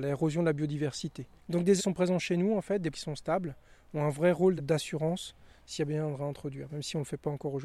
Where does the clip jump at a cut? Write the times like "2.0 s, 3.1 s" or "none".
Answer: 1.8 s, 2.9 s, 4.6 s